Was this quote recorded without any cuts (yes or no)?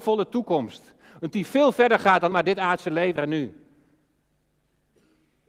no